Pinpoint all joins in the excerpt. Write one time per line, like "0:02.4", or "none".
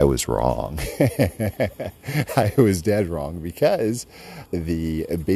0:04.5